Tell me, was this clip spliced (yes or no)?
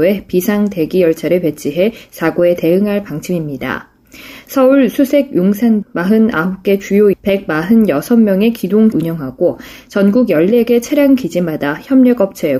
yes